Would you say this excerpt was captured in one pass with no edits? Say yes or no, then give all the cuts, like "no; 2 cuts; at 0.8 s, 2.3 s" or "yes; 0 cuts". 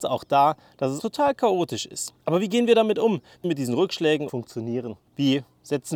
no; 5 cuts; at 1.0 s, 2.2 s, 3.4 s, 4.3 s, 5.1 s